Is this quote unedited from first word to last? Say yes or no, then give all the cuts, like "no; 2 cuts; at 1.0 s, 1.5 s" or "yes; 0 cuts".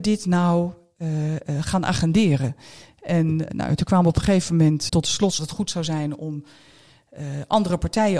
no; 3 cuts; at 3.5 s, 4.9 s, 5.4 s